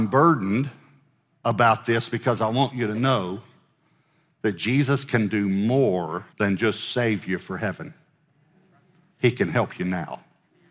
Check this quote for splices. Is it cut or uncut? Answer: cut